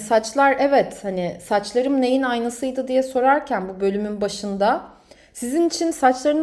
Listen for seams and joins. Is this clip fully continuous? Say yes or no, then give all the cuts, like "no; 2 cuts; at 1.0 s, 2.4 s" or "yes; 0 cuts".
yes; 0 cuts